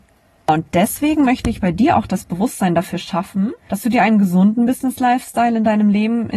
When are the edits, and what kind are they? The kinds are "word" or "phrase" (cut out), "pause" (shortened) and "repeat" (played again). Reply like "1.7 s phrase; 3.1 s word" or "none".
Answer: 3.6 s pause